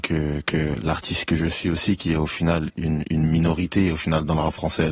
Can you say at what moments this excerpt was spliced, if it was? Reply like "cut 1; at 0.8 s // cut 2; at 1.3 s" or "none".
none